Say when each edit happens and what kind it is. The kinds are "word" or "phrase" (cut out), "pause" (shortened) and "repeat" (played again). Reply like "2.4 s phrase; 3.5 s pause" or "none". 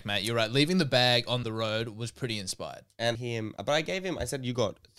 1.4 s phrase; 3.1 s phrase; 3.6 s word